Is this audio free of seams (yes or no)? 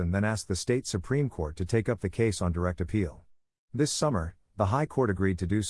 yes